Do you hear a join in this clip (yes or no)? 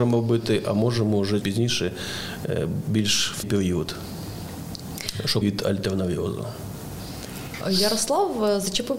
yes